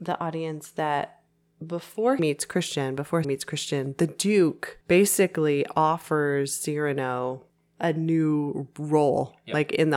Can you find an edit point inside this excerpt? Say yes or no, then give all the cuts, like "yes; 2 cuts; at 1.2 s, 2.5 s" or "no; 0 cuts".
yes; 4 cuts; at 2.2 s, 3.2 s, 4.8 s, 7.5 s